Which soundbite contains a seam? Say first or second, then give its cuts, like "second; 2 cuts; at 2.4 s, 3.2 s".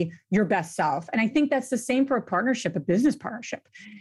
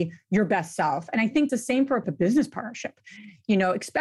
second; 2 cuts; at 1.5 s, 2.0 s